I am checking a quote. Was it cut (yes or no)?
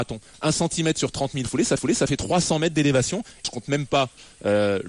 yes